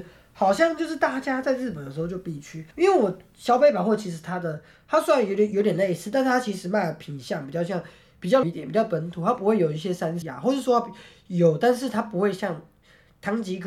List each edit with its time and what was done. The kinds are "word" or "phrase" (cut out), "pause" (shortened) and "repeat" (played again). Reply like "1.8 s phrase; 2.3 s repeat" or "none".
2.7 s pause; 8.4 s word; 10.2 s word

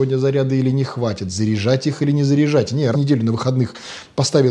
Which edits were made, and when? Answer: 2.9 s word

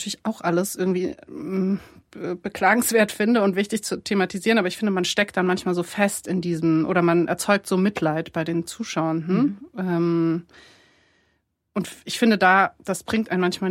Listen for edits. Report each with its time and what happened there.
none

